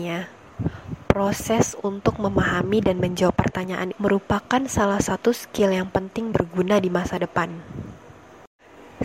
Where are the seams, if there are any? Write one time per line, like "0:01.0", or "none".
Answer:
0:03.9
0:06.3